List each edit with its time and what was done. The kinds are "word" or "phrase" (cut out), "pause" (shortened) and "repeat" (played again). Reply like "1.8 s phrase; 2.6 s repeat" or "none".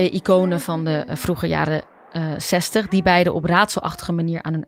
none